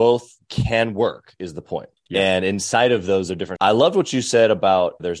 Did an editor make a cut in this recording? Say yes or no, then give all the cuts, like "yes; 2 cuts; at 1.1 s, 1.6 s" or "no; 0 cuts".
yes; 2 cuts; at 2.0 s, 3.6 s